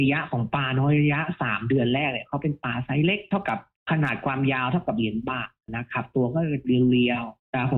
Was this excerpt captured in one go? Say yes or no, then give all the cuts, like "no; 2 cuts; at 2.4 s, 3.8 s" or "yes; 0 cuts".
yes; 0 cuts